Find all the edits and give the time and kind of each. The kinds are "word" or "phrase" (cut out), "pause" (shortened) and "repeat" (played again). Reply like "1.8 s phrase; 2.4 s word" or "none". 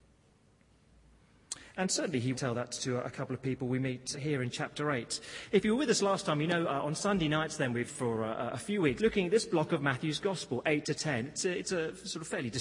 2.3 s phrase; 4.1 s word; 7.9 s word; 9.0 s word